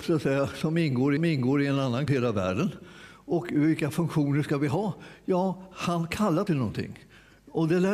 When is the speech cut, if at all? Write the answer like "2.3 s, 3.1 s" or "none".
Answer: 1.2 s, 2.1 s, 6.5 s